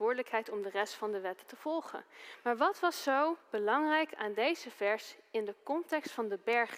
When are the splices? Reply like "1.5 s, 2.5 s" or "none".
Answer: 3.4 s